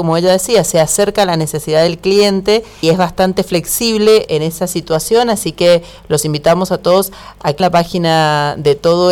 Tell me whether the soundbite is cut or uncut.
cut